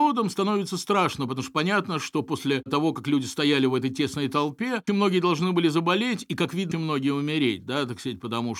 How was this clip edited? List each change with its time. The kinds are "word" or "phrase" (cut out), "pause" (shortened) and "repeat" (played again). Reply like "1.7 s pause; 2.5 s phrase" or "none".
4.9 s word; 6.7 s word